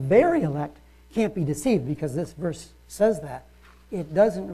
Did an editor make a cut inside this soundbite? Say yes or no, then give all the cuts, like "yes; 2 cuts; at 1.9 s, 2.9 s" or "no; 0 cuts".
no; 0 cuts